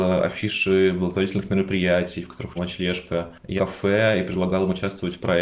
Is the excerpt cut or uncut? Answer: cut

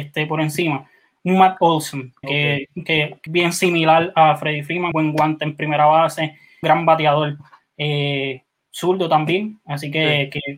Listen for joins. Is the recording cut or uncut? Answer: cut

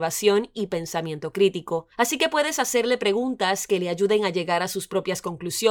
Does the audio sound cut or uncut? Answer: cut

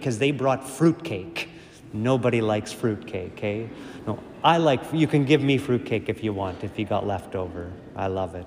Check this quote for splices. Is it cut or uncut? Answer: uncut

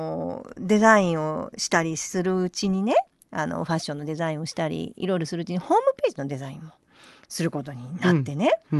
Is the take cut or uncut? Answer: uncut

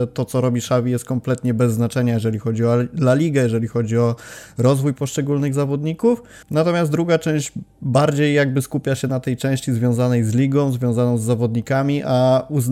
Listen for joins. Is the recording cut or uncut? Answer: cut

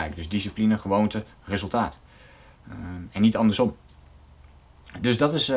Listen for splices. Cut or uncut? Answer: cut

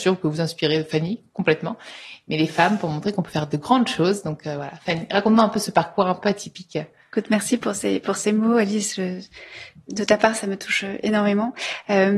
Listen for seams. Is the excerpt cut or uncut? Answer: uncut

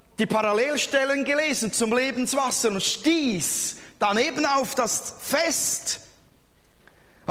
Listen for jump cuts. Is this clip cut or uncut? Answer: uncut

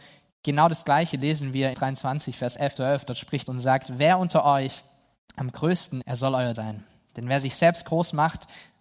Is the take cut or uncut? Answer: cut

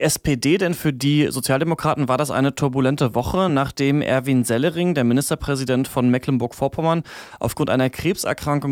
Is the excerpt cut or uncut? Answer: uncut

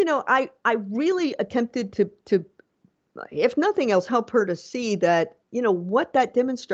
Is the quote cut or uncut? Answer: cut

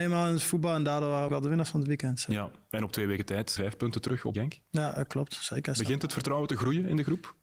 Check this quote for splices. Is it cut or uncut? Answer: cut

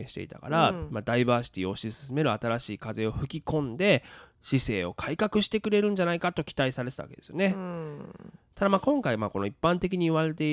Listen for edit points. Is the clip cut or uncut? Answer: uncut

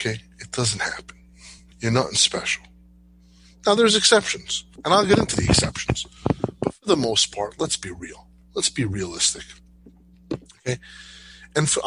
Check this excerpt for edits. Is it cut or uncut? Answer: uncut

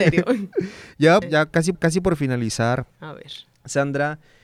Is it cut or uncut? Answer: cut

